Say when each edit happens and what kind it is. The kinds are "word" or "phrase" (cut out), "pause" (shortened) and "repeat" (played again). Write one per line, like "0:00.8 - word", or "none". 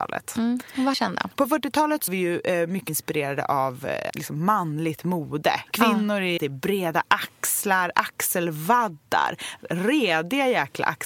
0:00.9 - word
0:02.1 - word
0:02.9 - word
0:04.1 - word
0:06.4 - word